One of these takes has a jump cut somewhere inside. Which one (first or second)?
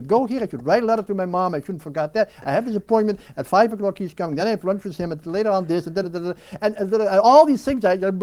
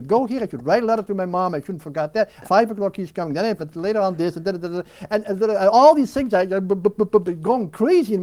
second